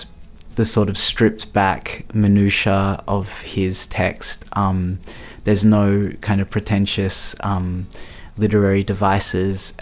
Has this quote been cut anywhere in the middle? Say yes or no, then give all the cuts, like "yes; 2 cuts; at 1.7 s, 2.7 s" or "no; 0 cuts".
no; 0 cuts